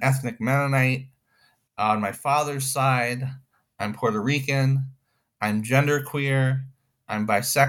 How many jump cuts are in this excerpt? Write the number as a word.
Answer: zero